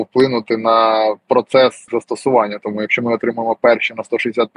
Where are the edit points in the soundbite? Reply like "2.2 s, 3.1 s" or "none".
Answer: 1.9 s